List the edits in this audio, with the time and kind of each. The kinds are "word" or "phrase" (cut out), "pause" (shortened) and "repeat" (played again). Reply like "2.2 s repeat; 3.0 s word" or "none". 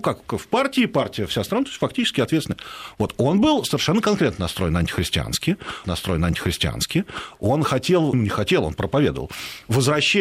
5.8 s repeat; 8.1 s word